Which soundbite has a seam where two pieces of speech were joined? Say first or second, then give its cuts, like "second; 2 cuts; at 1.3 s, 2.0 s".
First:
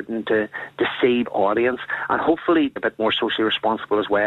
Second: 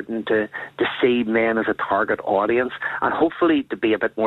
first; 2 cuts; at 1.2 s, 2.8 s